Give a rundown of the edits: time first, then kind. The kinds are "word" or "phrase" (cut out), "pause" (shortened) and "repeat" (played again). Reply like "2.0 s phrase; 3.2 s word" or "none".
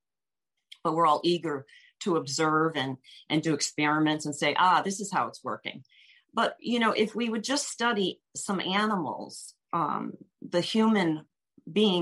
none